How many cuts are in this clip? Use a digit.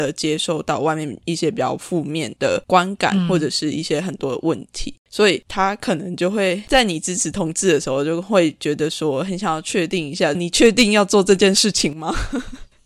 1